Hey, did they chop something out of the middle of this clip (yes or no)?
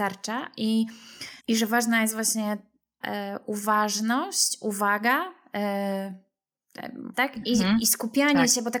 yes